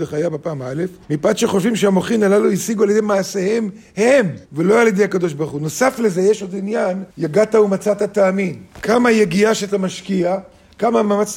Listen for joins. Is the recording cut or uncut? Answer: cut